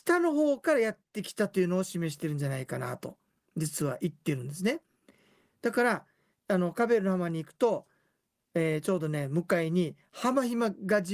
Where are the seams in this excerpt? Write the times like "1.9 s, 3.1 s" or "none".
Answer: none

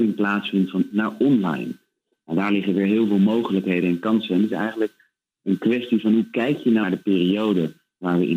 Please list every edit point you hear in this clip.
0.9 s, 6.8 s

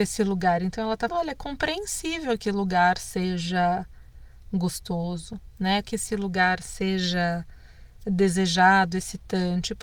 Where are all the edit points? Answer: 1.1 s, 2.4 s, 5.8 s

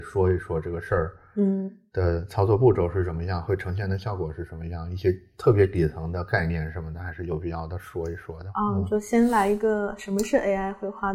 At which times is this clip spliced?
none

